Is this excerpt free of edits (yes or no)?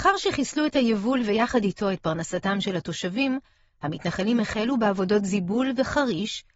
yes